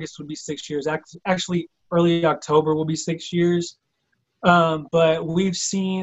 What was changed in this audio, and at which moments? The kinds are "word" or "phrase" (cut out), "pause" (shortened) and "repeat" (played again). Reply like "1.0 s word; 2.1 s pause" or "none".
none